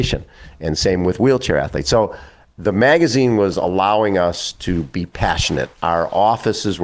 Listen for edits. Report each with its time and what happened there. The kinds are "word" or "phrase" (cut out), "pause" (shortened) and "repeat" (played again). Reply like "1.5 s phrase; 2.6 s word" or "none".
none